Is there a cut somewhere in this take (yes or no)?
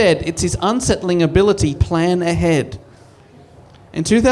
yes